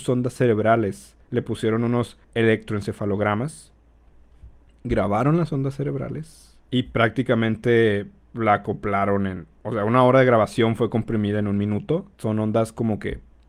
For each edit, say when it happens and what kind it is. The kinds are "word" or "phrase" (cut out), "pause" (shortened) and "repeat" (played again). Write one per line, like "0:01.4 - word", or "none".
0:02.2 - pause
0:06.6 - pause
0:09.6 - pause
0:12.1 - pause